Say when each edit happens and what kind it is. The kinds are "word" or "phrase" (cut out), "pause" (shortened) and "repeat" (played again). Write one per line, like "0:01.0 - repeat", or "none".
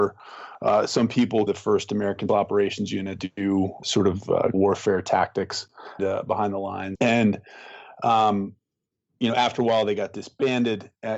0:01.5 - phrase
0:02.3 - word
0:03.2 - word
0:03.8 - word
0:04.5 - word
0:06.0 - word
0:07.0 - phrase